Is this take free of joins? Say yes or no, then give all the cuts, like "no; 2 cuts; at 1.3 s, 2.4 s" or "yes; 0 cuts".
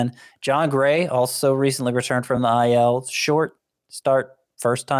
yes; 0 cuts